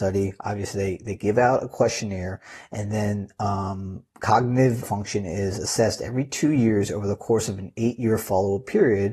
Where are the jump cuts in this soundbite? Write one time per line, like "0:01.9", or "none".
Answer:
0:04.8